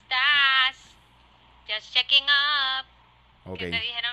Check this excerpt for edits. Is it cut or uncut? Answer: uncut